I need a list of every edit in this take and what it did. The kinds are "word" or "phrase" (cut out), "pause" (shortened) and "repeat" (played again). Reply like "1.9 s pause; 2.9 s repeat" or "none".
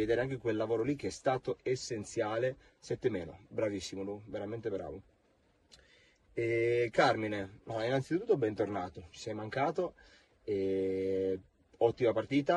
none

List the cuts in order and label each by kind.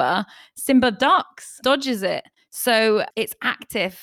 1.6 s word

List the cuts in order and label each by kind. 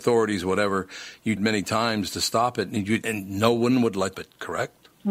1.4 s word; 3.0 s word; 4.1 s phrase

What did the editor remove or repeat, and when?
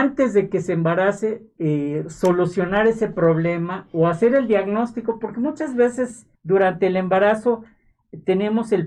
6.4 s pause

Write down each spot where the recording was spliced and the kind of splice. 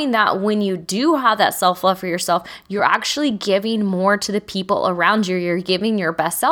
none

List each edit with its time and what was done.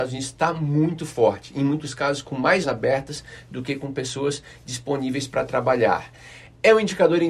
2.6 s word

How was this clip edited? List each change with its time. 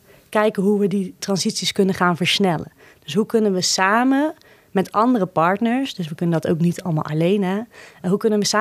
1.2 s word

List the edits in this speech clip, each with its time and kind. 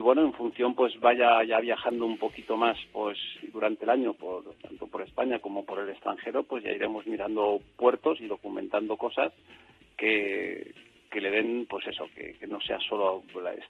4.6 s pause

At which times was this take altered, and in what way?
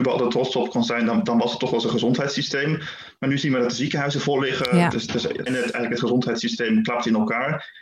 5.5 s phrase

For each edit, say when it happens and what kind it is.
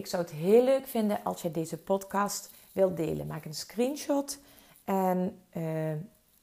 none

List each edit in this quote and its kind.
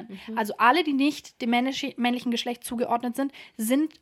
none

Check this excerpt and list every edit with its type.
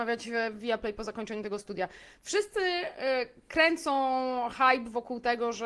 none

